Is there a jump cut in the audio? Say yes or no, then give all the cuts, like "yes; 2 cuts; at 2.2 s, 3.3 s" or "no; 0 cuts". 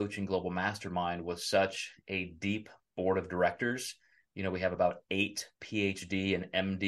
no; 0 cuts